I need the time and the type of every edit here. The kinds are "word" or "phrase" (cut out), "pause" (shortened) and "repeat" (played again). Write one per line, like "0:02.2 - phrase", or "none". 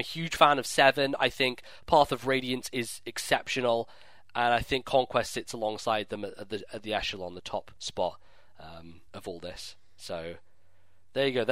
0:07.8 - pause
0:09.1 - pause